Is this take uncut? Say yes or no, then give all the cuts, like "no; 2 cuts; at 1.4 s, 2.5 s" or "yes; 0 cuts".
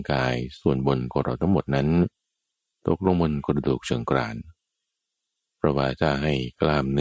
yes; 0 cuts